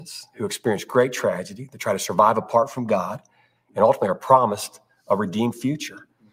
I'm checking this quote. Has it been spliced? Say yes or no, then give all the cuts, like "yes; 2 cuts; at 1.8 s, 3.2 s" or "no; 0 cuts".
no; 0 cuts